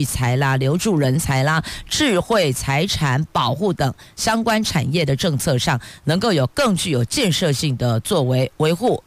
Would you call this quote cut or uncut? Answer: uncut